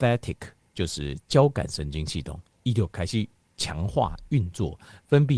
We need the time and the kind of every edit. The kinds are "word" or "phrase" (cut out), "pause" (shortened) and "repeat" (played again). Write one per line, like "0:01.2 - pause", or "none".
0:03.4 - pause